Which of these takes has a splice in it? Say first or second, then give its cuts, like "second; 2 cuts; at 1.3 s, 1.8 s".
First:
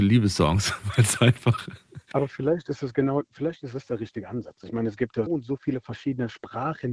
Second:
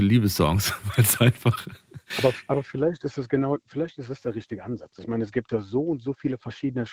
first; 2 cuts; at 2.1 s, 5.3 s